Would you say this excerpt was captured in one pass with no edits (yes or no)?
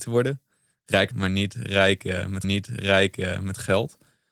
no